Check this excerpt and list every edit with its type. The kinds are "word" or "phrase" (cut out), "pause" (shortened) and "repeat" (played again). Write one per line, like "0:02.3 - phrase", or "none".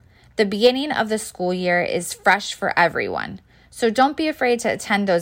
none